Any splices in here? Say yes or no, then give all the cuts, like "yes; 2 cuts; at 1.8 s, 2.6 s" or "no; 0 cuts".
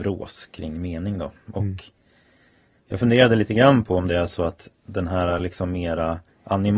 no; 0 cuts